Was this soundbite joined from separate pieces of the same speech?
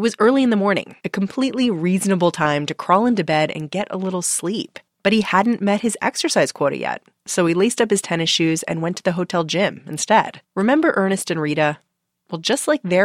yes; 4 cuts; at 1.0 s, 4.9 s, 7.2 s, 10.4 s

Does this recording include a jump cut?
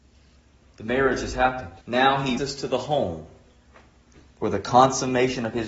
yes; 2 cuts; at 1.8 s, 2.4 s

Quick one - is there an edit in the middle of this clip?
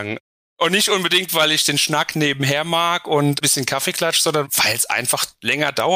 no; 0 cuts

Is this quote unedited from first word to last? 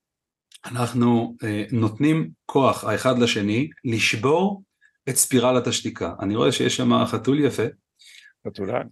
yes; 0 cuts

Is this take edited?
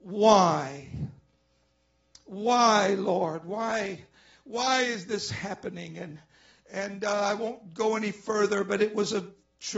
no; 0 cuts

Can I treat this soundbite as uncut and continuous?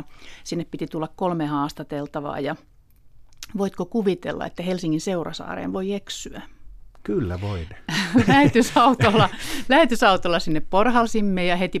yes; 0 cuts

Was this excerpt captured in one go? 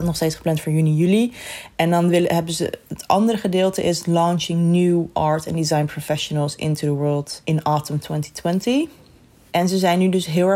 yes; 0 cuts

